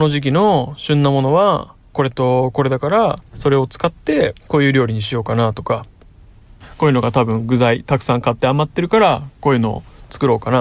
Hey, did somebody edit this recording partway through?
yes; 2 cuts; at 3.3 s, 4.4 s

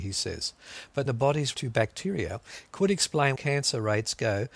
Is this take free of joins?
no; 3 cuts; at 1.1 s, 1.5 s, 3.4 s

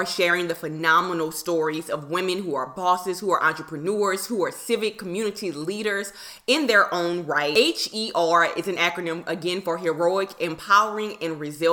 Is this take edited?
no; 0 cuts

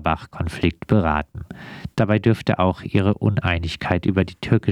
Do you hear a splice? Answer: no; 0 cuts

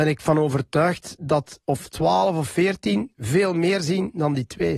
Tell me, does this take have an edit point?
yes; 1 cut; at 1.6 s

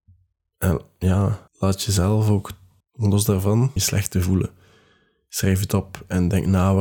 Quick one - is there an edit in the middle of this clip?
yes; 3 cuts; at 1.5 s, 2.8 s, 3.8 s

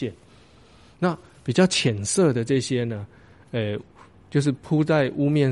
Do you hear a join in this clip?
no; 0 cuts

